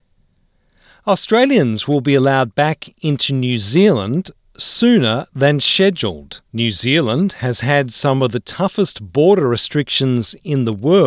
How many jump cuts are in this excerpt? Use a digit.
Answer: 1